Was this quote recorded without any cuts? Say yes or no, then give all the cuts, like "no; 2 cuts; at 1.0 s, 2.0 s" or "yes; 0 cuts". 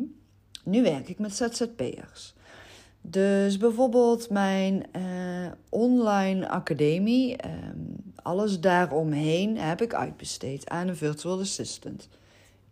yes; 0 cuts